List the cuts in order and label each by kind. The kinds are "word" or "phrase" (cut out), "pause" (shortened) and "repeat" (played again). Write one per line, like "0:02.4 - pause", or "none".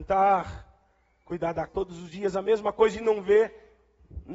0:01.7 - word